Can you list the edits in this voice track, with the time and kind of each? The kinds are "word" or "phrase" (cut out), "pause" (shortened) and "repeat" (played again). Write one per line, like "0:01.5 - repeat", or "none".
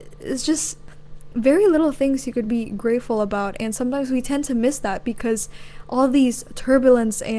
none